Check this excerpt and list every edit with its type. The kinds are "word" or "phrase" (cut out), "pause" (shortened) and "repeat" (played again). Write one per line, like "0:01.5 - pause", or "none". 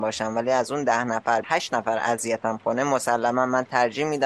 0:01.4 - word